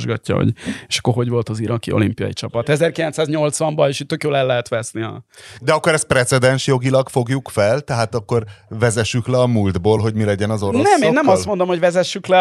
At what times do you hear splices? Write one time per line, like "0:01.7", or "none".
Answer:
none